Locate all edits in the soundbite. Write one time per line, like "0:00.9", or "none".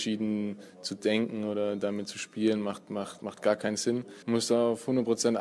0:04.2